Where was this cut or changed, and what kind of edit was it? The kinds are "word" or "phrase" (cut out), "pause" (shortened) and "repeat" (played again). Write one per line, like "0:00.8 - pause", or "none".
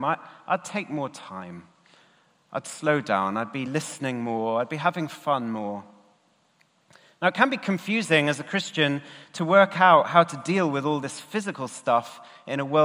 none